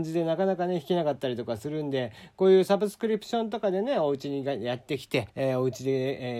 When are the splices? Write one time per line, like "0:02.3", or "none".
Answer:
0:05.3

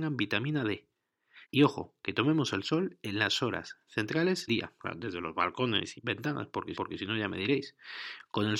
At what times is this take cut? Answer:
0:01.4
0:04.5
0:05.9
0:06.7

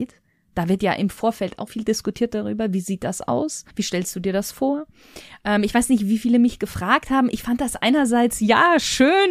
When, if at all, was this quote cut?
0:01.7
0:03.7

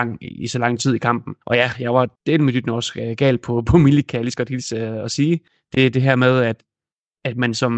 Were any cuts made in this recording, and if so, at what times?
0:01.4
0:02.2
0:05.5

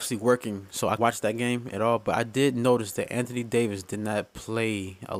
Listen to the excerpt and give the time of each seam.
0:01.0

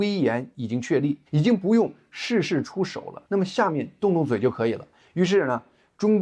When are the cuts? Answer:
0:01.3
0:03.3

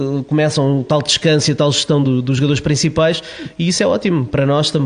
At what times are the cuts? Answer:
none

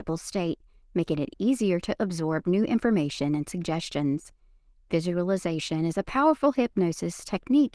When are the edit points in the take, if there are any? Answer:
none

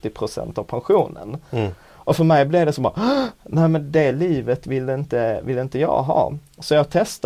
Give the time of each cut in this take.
none

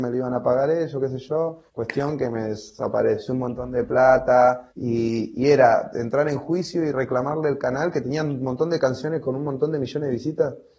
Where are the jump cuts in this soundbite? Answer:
0:01.7
0:04.7

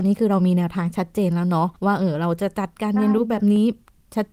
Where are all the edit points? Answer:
0:01.8

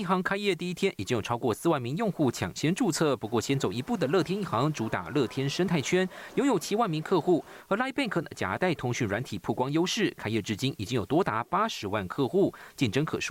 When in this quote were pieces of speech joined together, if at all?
none

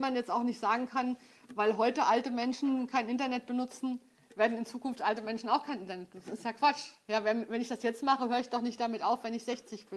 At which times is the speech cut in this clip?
none

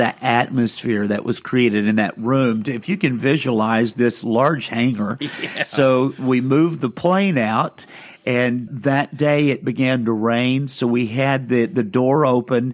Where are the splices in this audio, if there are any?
0:08.7

